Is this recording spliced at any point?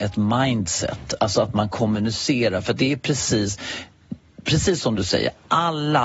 no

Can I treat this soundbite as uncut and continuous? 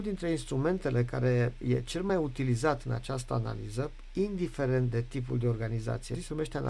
yes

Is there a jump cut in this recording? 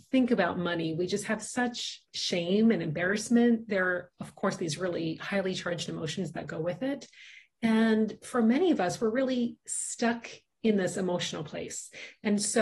yes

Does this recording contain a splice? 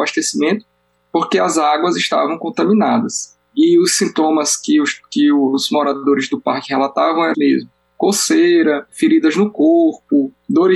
yes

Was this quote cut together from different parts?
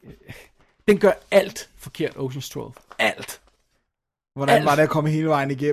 no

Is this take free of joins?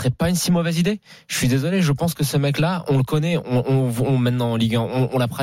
yes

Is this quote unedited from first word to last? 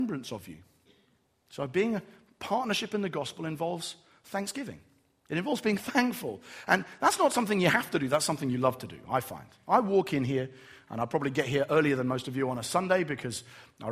yes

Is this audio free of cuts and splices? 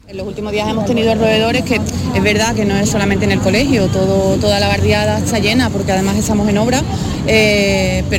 yes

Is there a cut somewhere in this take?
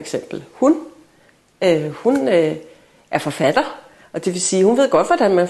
no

